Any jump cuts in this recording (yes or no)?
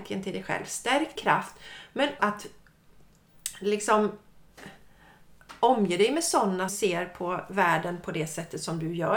yes